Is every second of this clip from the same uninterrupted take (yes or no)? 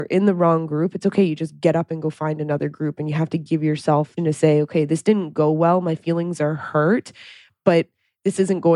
no